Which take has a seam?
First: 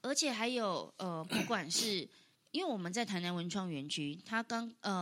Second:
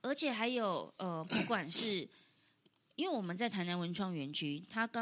first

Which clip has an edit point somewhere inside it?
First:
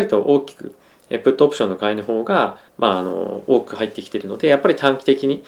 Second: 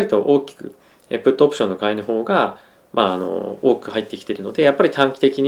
first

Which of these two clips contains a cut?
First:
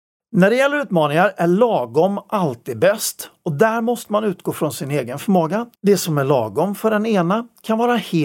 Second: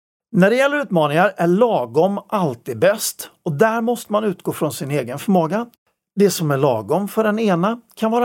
first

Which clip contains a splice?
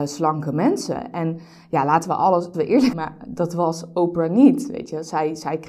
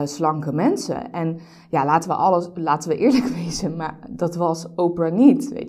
first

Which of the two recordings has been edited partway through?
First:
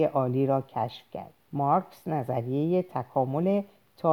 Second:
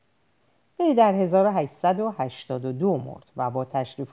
first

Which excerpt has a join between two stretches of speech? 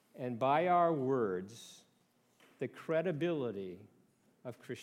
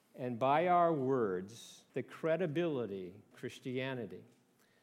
second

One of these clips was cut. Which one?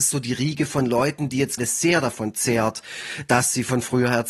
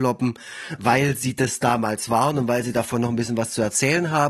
first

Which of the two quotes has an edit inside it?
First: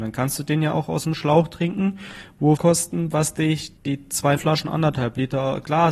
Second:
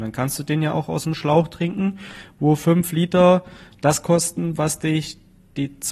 first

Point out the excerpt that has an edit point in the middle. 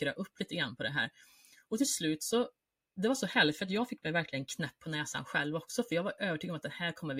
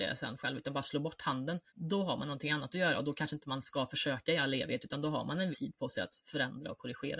second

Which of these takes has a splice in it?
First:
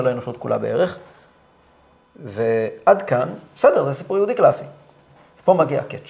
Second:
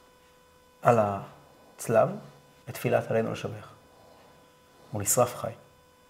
second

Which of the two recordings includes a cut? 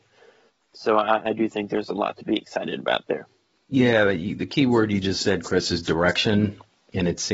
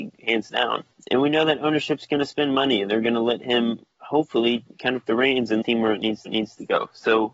second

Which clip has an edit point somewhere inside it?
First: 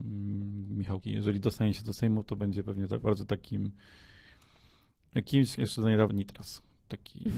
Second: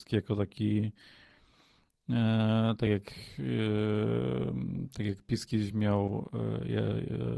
first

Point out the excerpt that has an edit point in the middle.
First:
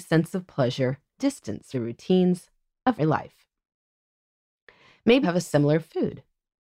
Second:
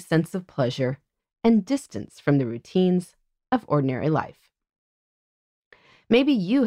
first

